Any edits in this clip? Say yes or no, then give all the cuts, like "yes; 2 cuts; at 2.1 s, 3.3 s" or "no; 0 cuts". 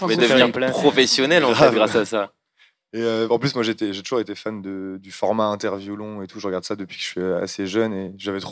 no; 0 cuts